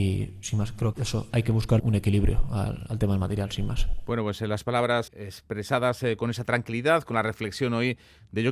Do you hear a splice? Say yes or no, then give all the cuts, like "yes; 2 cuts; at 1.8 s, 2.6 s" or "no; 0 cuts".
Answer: yes; 3 cuts; at 0.9 s, 1.8 s, 5.1 s